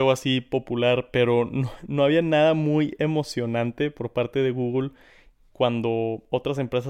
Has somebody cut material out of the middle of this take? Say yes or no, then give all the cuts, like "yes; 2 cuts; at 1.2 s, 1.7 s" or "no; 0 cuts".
no; 0 cuts